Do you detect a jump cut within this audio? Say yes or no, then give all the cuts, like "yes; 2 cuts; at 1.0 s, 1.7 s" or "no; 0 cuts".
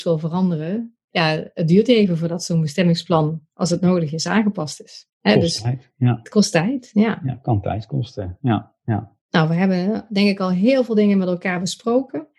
yes; 2 cuts; at 5.1 s, 9.2 s